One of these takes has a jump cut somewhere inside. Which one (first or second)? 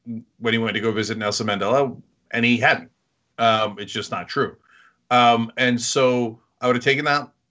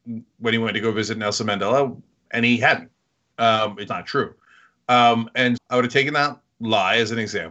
second